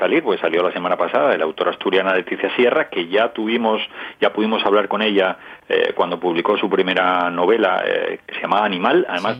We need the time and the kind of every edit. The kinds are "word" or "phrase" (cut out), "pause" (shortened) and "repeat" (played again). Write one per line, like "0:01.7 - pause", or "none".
none